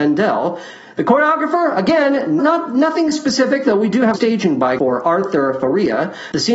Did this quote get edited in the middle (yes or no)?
yes